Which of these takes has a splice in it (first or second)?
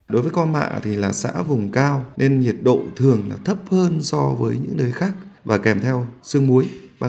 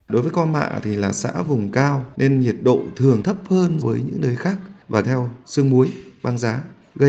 second